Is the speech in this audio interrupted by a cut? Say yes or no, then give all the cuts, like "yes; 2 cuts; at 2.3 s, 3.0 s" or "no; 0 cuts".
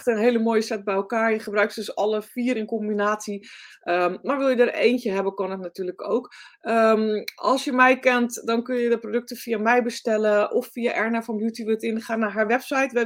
no; 0 cuts